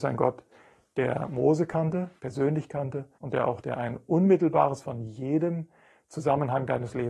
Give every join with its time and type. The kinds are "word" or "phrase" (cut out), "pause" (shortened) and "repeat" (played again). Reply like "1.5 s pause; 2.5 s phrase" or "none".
2.2 s pause; 3.1 s pause; 3.6 s phrase; 4.8 s word